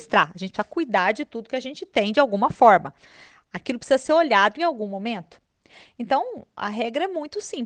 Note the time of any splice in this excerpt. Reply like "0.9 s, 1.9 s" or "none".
none